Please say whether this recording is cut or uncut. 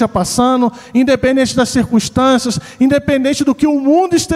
uncut